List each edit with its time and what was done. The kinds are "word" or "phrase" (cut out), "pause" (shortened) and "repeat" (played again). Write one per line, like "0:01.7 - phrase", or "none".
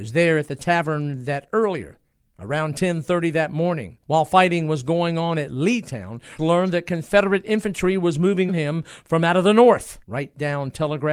0:02.1 - pause
0:04.0 - pause
0:06.4 - word
0:08.5 - word
0:10.0 - pause